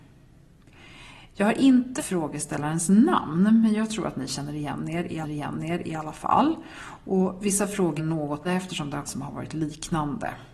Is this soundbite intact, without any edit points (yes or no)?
no